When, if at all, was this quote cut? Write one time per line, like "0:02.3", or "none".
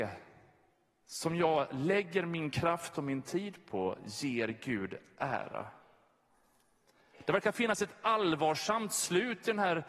none